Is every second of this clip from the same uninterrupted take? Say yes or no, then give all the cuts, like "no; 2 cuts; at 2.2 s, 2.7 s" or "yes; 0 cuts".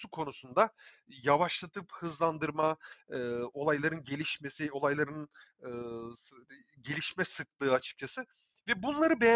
yes; 0 cuts